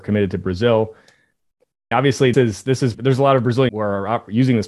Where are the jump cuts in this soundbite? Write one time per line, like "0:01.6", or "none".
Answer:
0:01.9
0:02.3
0:02.9
0:03.7